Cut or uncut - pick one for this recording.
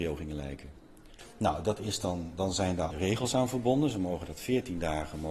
cut